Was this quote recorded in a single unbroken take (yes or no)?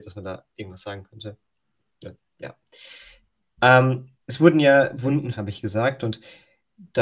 no